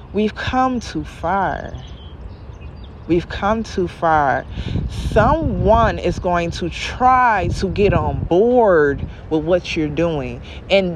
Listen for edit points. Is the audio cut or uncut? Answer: uncut